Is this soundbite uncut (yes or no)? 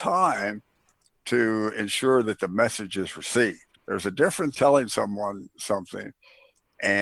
no